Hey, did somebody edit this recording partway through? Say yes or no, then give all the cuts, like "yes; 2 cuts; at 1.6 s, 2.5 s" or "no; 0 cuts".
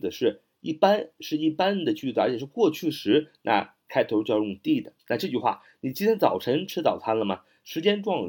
yes; 1 cut; at 5.0 s